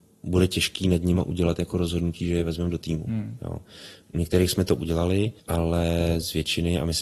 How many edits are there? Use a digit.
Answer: 1